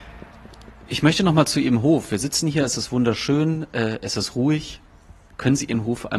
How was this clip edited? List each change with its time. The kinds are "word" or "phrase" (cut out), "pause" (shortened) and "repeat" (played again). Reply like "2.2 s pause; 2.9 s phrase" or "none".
none